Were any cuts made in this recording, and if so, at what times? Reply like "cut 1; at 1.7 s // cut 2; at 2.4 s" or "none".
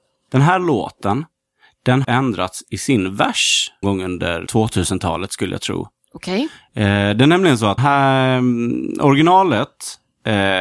cut 1; at 2.0 s // cut 2; at 3.8 s // cut 3; at 4.5 s // cut 4; at 7.8 s

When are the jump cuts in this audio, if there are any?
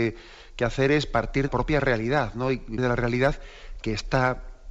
cut 1; at 1.5 s // cut 2; at 2.8 s

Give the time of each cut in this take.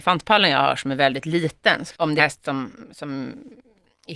cut 1; at 2.2 s

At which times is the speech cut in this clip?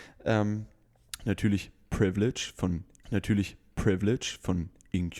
cut 1; at 3.0 s

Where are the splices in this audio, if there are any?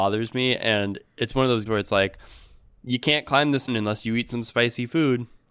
cut 1; at 1.7 s // cut 2; at 3.7 s

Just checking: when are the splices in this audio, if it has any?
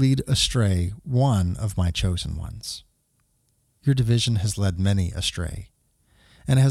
none

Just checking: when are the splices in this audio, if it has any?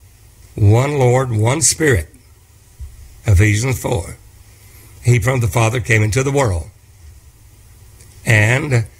cut 1; at 5.2 s

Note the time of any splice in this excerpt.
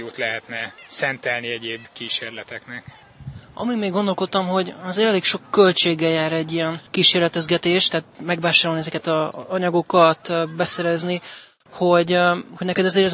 cut 1; at 8.1 s

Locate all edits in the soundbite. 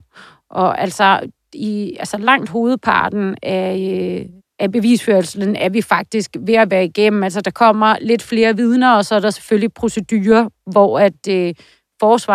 cut 1; at 4.4 s

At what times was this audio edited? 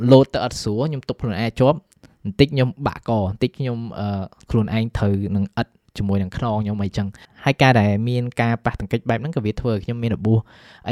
cut 1; at 4.5 s

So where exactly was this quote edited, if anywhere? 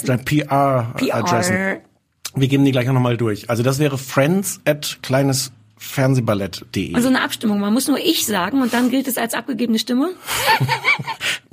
none

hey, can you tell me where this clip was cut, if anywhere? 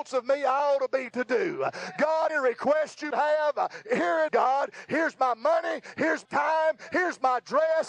cut 1; at 1.1 s // cut 2; at 2.3 s // cut 3; at 3.1 s // cut 4; at 4.3 s // cut 5; at 6.2 s

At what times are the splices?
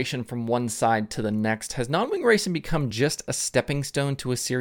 none

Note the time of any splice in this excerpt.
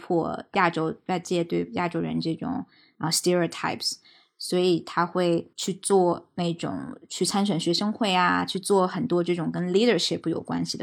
none

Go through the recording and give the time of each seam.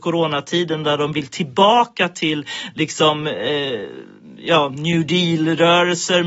none

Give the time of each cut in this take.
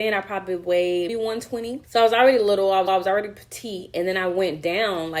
cut 1; at 1.1 s // cut 2; at 1.8 s // cut 3; at 2.9 s

